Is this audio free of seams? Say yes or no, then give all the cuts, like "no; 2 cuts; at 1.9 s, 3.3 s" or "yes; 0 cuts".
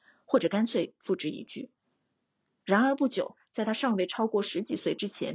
yes; 0 cuts